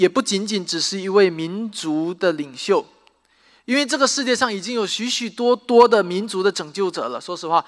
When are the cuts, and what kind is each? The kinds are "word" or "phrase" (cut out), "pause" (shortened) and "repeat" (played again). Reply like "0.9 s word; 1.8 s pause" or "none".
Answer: none

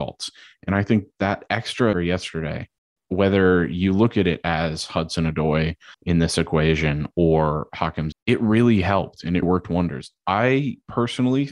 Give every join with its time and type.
1.9 s word; 2.8 s pause; 5.9 s pause; 8.1 s word; 9.4 s word

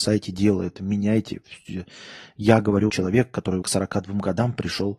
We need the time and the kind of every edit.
2.9 s word; 3.6 s word

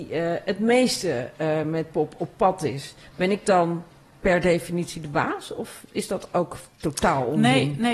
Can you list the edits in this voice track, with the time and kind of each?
none

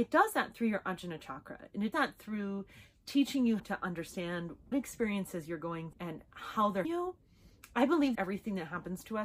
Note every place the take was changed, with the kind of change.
1.9 s word; 3.6 s word; 4.7 s word; 5.9 s word; 6.8 s word; 8.1 s word

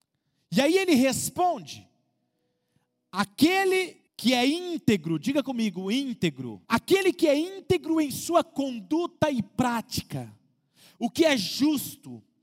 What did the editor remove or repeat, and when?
4.1 s pause; 6.6 s pause

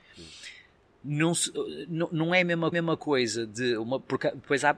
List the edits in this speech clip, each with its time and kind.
2.7 s repeat

